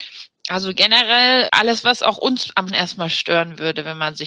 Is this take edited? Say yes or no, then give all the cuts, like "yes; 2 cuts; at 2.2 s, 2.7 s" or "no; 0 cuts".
yes; 2 cuts; at 1.5 s, 2.7 s